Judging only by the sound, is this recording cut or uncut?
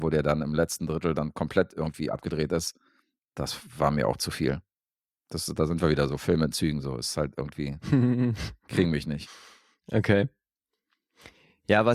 uncut